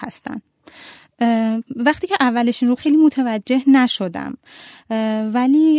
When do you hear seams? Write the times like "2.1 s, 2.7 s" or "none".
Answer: 1.7 s, 2.8 s